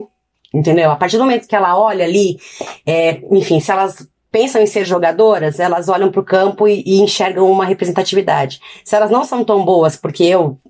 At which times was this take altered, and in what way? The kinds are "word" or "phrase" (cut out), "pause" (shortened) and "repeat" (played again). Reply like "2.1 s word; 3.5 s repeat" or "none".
none